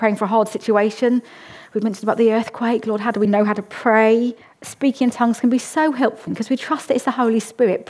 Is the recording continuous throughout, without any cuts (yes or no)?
no